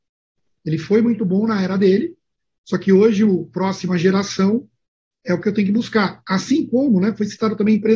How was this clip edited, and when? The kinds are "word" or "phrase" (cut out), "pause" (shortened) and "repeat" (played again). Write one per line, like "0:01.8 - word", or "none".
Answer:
none